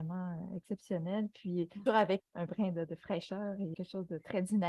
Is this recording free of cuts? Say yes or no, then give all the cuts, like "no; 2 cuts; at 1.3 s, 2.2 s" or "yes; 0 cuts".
no; 4 cuts; at 1.9 s, 2.2 s, 2.9 s, 3.7 s